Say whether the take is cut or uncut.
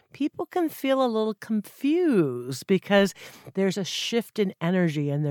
uncut